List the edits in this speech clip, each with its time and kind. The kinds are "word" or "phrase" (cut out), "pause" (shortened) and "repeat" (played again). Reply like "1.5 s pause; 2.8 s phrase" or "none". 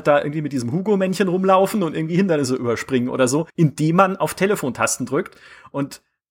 3.5 s pause